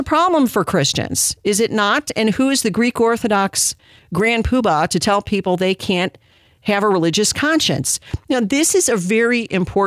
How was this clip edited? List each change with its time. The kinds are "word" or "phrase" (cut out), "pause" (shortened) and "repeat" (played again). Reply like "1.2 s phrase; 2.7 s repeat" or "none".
none